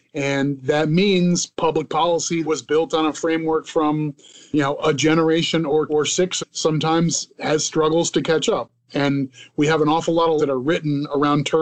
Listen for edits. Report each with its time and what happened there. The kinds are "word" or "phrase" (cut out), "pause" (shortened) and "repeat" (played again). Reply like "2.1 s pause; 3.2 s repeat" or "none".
2.4 s word; 5.9 s word; 6.4 s word; 10.4 s word